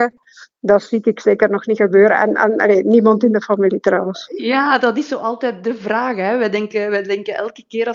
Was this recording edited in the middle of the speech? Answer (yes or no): no